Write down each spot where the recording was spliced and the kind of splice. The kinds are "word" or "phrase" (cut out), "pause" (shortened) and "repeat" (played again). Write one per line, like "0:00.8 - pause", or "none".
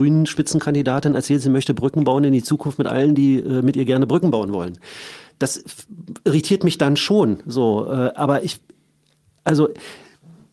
none